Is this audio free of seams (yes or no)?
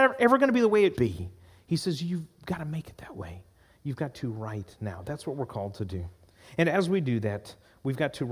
no